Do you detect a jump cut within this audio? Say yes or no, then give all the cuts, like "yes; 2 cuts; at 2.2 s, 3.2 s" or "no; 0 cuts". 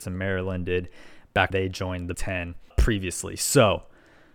yes; 3 cuts; at 1.5 s, 2.1 s, 2.7 s